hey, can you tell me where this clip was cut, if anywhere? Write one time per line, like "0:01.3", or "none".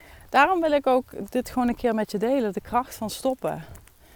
none